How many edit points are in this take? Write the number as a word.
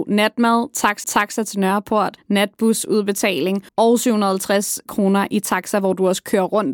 two